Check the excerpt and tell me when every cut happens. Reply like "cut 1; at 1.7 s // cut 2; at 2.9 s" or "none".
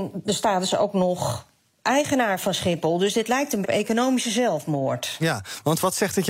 cut 1; at 3.6 s